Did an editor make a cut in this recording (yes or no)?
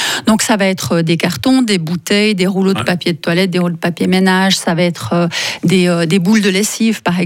no